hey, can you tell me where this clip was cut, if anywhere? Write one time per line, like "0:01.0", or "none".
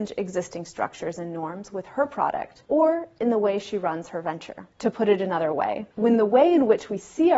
0:02.6
0:04.7
0:05.9

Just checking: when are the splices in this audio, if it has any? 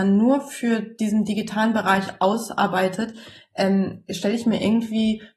none

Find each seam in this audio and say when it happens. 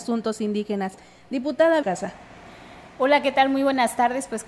0:01.8

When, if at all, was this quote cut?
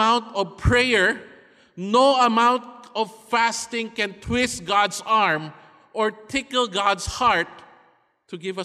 none

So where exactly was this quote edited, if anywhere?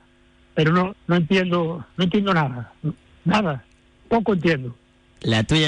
0:00.9

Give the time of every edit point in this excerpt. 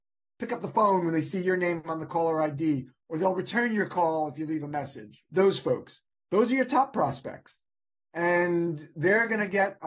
none

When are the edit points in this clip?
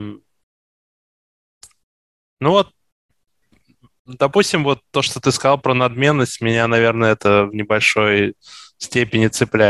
none

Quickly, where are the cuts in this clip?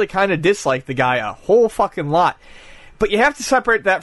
none

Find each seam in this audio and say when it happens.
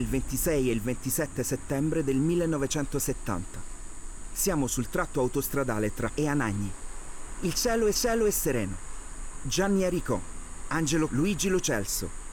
0:06.1
0:07.9
0:11.1

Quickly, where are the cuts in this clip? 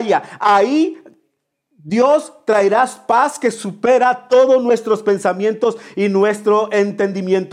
none

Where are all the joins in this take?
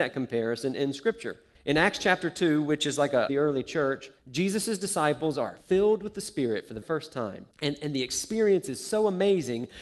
0:01.5
0:03.3
0:04.2
0:05.6
0:06.8
0:07.5

